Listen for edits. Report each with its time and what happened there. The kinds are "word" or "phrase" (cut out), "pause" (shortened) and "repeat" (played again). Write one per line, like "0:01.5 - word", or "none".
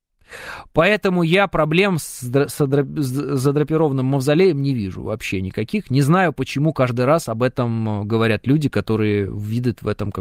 none